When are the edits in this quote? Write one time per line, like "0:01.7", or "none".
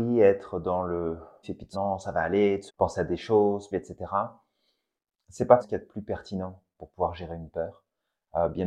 0:01.4
0:01.7
0:02.7
0:03.7
0:05.6